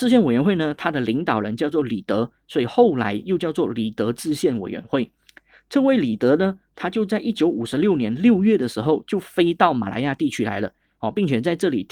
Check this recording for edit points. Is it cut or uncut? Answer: uncut